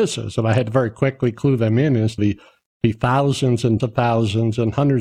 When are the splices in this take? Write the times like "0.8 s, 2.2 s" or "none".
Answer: 2.2 s, 3.8 s